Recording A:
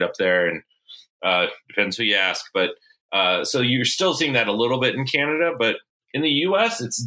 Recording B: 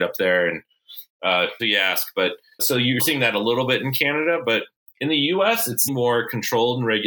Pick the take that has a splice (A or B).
B